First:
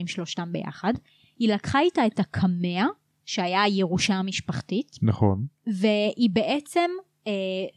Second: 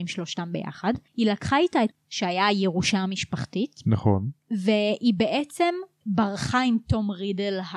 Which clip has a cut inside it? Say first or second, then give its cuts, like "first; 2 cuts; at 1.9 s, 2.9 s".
second; 3 cuts; at 1.1 s, 1.9 s, 6.0 s